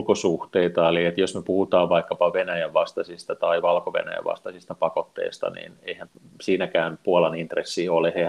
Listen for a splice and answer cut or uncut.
uncut